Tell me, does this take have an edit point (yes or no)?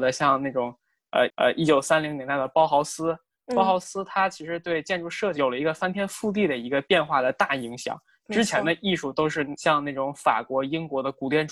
yes